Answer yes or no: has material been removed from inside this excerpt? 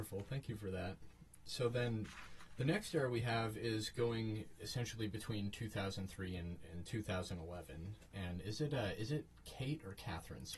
no